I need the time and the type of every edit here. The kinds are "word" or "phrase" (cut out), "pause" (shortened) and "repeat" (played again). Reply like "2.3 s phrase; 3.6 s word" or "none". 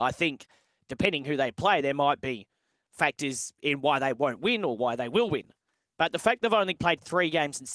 none